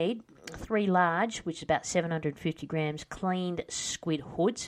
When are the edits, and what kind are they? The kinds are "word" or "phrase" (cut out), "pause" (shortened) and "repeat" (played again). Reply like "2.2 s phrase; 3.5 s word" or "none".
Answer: none